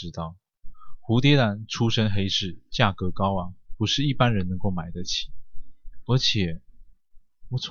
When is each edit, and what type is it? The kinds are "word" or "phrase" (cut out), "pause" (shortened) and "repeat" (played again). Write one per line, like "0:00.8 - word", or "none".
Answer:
none